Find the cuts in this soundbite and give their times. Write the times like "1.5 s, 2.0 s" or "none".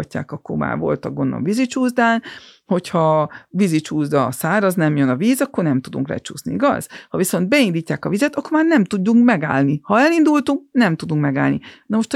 none

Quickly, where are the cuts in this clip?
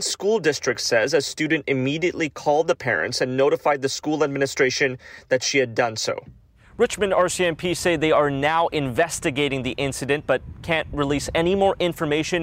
none

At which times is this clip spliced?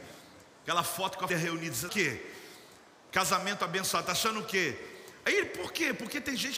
1.3 s, 1.9 s

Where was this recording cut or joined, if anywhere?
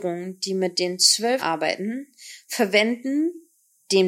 1.4 s

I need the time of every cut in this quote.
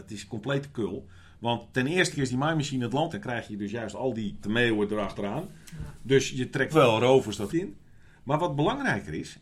2.1 s, 3.1 s, 4.4 s, 6.7 s, 7.5 s

